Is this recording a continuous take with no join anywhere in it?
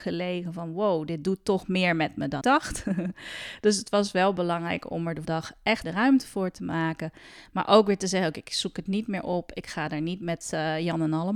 no; 3 cuts; at 2.4 s, 5.2 s, 5.8 s

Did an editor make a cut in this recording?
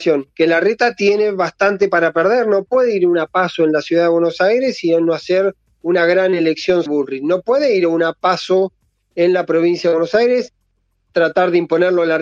yes; 1 cut; at 6.9 s

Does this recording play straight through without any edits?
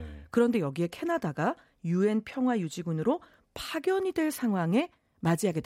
yes; 0 cuts

